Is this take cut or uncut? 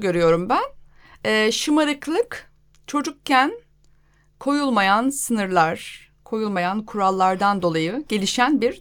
uncut